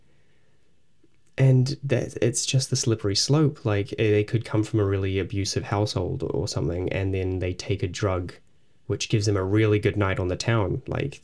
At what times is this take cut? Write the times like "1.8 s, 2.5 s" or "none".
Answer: none